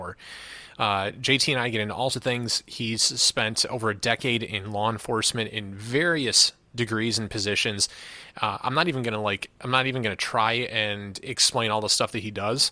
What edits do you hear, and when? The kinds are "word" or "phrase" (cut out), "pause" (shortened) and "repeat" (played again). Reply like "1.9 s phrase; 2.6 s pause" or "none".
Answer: 2.1 s word